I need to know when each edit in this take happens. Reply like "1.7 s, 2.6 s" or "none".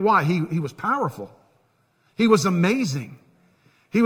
none